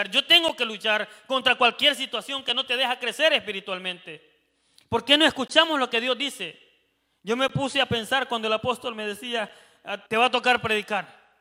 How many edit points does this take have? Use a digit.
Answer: 1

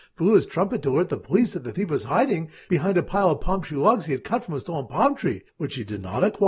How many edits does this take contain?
1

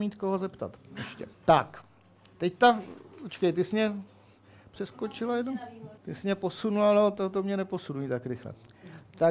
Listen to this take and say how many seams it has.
2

